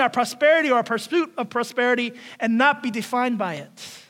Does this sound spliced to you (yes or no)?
no